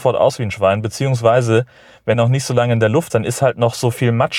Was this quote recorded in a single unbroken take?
no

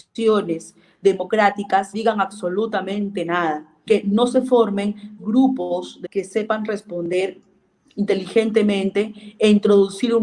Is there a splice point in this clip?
yes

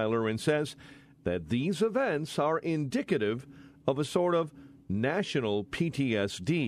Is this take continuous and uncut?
yes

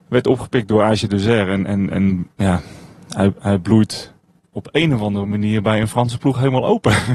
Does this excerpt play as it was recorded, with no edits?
yes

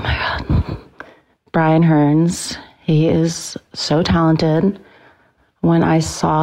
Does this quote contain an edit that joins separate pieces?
no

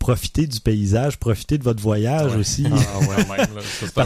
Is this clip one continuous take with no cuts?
yes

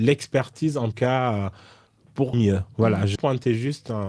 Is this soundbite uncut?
no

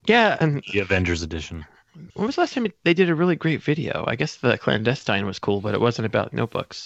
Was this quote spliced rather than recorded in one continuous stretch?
yes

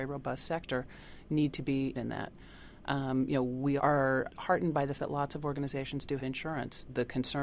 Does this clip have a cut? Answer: yes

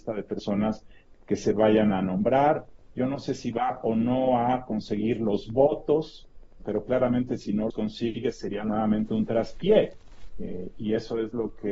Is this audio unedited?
no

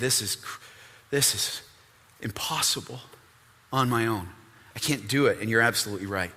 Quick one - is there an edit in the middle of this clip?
no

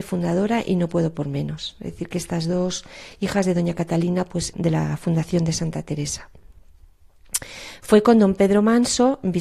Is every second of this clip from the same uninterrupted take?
no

